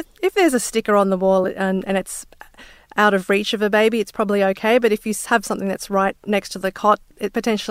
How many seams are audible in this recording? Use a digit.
0